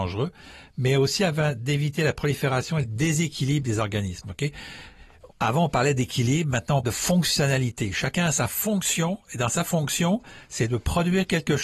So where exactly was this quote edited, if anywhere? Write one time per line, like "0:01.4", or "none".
0:05.3
0:06.8